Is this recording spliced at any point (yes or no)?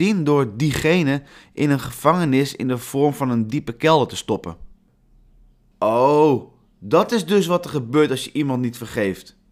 no